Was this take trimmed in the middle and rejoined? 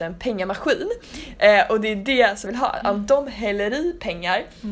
yes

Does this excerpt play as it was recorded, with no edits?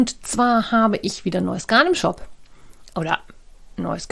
yes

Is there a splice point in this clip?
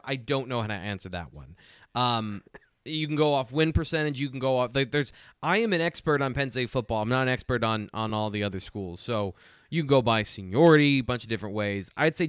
no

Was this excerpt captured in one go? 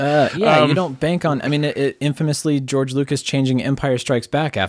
yes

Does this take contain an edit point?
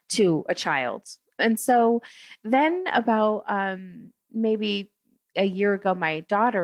no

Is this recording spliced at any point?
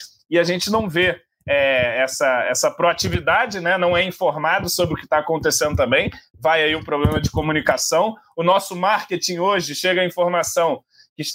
no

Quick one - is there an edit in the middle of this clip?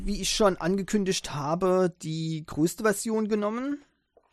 no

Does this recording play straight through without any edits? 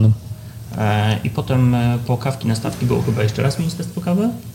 yes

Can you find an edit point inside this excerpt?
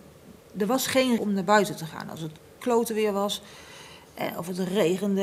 yes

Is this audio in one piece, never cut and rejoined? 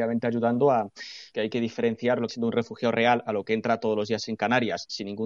no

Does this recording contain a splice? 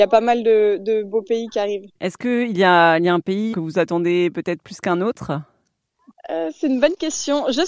yes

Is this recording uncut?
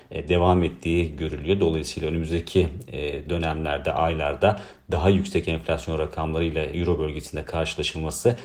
yes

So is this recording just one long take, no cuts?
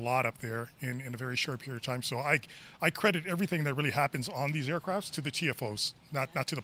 yes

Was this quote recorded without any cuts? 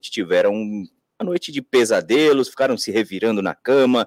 yes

